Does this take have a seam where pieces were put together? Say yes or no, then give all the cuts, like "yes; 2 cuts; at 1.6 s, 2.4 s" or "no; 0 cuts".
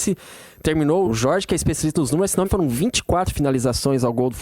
yes; 2 cuts; at 1.0 s, 2.4 s